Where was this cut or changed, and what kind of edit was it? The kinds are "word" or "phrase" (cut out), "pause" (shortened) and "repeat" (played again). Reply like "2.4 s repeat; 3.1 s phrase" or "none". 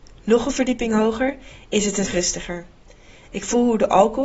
2.0 s word